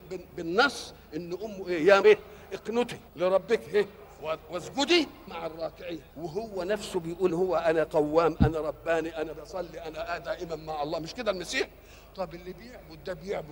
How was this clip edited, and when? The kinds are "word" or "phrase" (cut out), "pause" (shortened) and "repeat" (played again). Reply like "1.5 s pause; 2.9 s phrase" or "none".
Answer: 2.0 s word; 3.1 s pause; 5.3 s word; 6.1 s pause; 7.3 s word